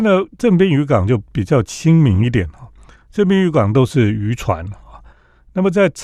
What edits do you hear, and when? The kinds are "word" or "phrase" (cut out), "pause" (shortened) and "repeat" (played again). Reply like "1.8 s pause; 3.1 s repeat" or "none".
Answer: 1.3 s pause